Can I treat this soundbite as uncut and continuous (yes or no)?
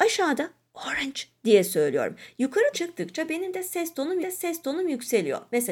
no